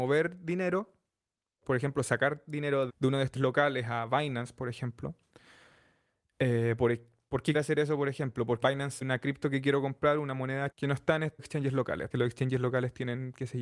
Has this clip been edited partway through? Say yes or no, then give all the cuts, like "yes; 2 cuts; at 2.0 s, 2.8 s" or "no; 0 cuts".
yes; 8 cuts; at 2.9 s, 3.3 s, 7.5 s, 8.6 s, 9.0 s, 10.7 s, 11.4 s, 12.1 s